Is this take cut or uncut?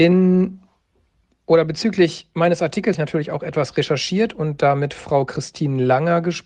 cut